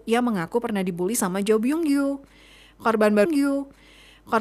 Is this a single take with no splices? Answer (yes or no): no